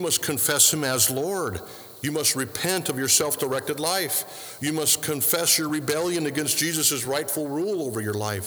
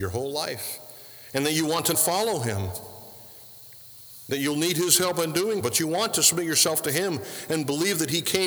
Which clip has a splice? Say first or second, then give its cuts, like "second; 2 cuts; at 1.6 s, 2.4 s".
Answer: second; 2 cuts; at 1.9 s, 5.6 s